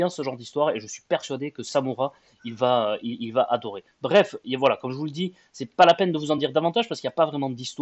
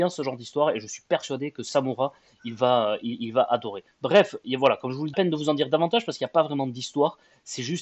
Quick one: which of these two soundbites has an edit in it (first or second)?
second